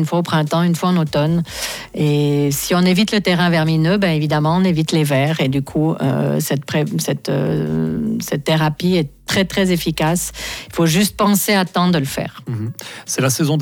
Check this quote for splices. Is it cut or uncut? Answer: uncut